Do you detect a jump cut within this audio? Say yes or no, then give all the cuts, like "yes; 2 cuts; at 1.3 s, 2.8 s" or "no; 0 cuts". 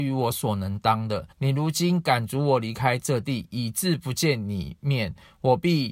yes; 1 cut; at 1.3 s